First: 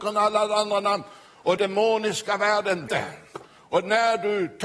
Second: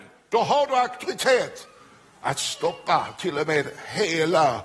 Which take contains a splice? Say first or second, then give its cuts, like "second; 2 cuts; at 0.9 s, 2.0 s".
first; 3 cuts; at 1.6 s, 2.9 s, 3.5 s